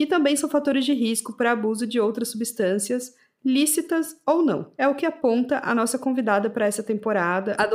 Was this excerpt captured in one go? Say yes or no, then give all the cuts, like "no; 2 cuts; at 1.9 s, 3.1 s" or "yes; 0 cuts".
yes; 0 cuts